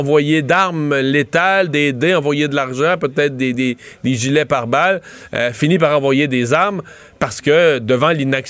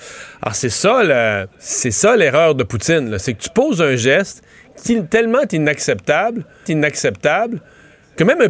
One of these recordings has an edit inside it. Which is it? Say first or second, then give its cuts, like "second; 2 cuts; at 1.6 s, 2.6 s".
second; 3 cuts; at 1.5 s, 4.8 s, 6.6 s